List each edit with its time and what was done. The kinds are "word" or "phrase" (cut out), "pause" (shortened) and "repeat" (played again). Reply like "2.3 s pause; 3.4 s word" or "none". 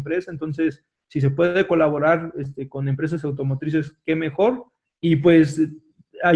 4.8 s pause